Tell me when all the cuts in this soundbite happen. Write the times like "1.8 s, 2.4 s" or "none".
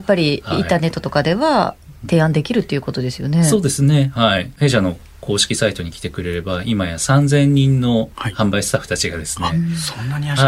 none